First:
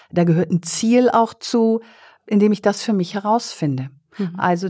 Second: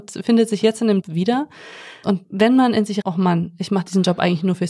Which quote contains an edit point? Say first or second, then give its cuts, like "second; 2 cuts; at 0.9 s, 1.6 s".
second; 3 cuts; at 1.0 s, 2.2 s, 3.0 s